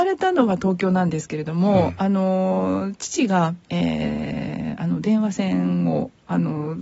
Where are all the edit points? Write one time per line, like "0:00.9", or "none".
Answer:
0:03.6